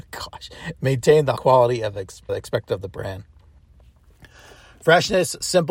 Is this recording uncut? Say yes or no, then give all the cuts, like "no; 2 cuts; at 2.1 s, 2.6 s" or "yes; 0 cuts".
no; 2 cuts; at 1.4 s, 2.3 s